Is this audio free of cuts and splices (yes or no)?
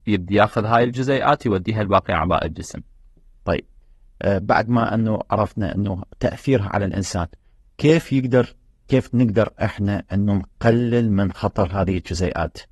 yes